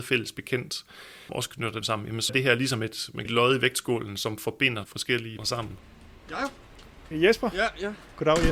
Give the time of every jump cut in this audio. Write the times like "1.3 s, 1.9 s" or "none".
1.3 s, 1.8 s, 2.3 s, 3.3 s, 4.9 s, 5.4 s, 7.1 s